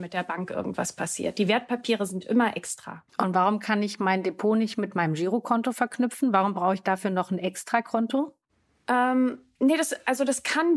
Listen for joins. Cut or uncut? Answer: cut